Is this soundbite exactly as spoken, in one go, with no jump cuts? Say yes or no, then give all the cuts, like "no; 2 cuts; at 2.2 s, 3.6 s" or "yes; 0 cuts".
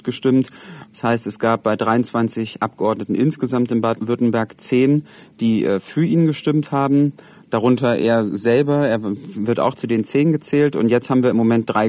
yes; 0 cuts